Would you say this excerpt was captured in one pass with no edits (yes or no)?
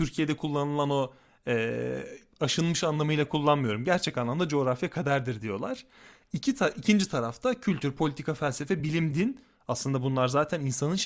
yes